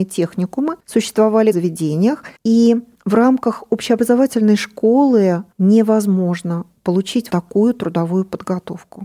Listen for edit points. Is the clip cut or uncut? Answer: cut